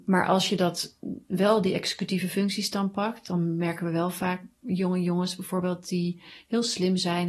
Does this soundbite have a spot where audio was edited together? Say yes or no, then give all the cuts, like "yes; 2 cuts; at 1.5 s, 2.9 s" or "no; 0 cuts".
no; 0 cuts